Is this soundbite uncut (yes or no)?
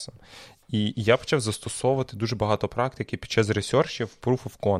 yes